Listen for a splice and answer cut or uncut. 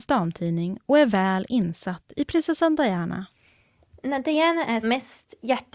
cut